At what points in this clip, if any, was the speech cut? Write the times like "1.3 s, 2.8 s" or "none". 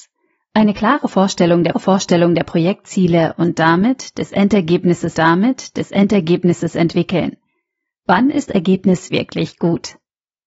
1.7 s, 5.1 s, 8.5 s, 9.1 s